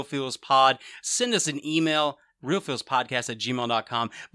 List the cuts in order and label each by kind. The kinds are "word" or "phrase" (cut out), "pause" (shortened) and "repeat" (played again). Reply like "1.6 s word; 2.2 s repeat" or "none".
none